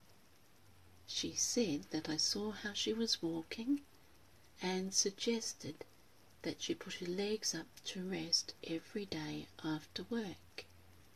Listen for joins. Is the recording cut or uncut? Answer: uncut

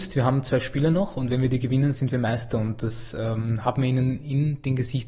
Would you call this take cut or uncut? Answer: uncut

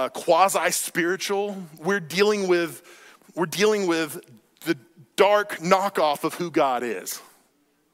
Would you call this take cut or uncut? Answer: uncut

